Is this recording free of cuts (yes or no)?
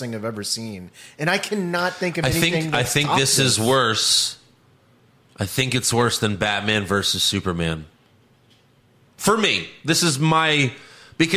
yes